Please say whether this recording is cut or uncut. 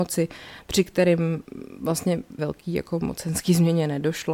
cut